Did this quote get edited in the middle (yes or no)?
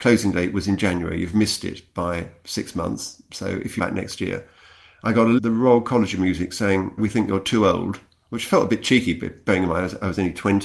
yes